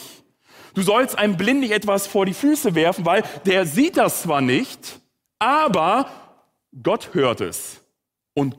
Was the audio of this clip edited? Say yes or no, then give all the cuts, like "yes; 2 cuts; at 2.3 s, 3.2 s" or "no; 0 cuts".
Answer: no; 0 cuts